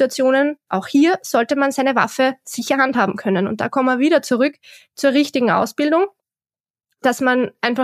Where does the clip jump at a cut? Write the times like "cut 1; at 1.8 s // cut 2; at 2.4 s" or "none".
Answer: none